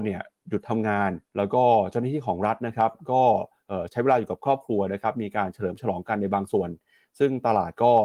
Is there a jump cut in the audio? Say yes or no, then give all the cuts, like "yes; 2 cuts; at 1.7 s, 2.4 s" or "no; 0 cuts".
yes; 1 cut; at 1.3 s